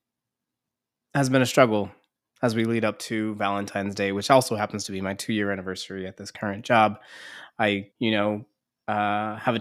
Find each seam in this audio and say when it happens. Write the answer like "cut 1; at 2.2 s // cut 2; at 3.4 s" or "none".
cut 1; at 7.9 s